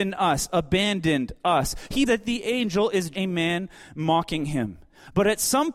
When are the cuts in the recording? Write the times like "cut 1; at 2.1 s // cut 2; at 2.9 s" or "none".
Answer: cut 1; at 2.1 s // cut 2; at 3.1 s